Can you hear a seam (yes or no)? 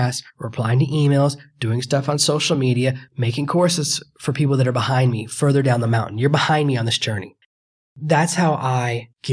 no